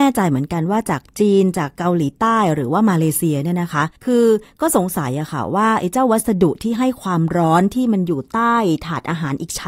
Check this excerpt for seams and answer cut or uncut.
cut